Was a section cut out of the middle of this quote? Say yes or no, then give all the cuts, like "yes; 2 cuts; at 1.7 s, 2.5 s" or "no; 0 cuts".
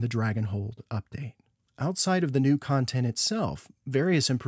no; 0 cuts